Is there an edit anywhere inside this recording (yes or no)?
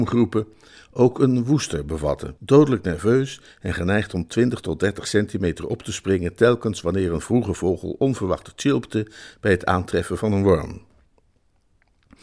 yes